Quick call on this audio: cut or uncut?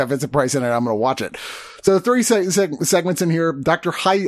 uncut